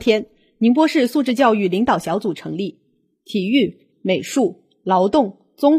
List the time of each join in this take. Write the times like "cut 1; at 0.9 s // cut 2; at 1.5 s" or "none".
cut 1; at 3.9 s